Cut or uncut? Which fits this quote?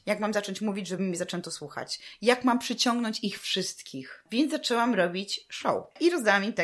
uncut